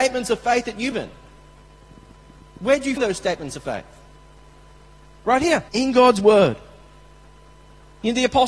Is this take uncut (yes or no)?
no